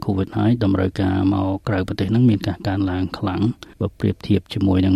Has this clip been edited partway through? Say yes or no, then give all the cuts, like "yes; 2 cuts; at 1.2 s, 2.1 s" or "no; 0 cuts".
yes; 1 cut; at 3.7 s